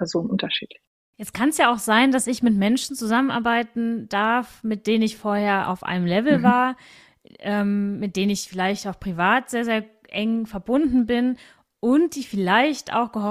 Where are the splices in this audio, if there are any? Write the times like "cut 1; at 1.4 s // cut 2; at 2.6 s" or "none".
none